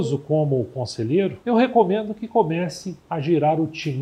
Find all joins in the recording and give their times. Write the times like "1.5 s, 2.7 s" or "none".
1.4 s, 3.0 s